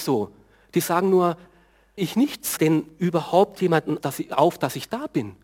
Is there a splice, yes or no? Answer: yes